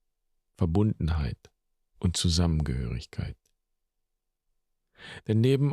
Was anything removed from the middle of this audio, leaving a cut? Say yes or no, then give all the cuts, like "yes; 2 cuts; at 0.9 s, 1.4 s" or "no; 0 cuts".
no; 0 cuts